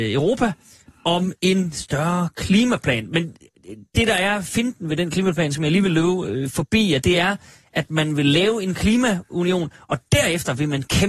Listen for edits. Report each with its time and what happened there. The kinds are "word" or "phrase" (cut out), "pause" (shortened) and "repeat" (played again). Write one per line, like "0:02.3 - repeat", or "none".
none